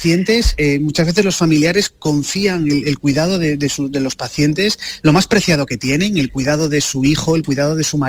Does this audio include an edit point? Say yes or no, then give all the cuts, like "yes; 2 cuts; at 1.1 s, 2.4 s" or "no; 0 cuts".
no; 0 cuts